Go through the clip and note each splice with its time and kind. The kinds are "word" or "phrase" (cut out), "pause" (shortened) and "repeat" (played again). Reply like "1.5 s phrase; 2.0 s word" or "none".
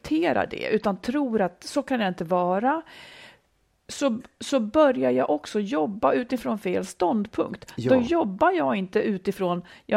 none